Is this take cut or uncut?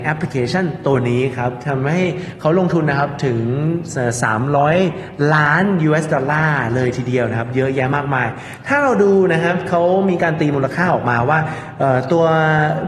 uncut